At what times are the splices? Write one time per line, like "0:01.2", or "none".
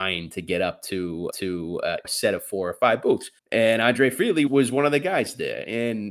0:01.3
0:02.0
0:03.4
0:04.5